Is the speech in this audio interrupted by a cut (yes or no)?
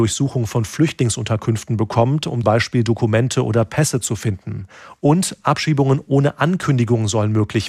yes